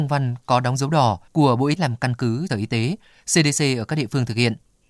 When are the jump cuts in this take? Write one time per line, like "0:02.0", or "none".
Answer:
0:01.3
0:01.8
0:02.5